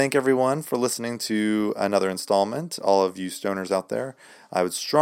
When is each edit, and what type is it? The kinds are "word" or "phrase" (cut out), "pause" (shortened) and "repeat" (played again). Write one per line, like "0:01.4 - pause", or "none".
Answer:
none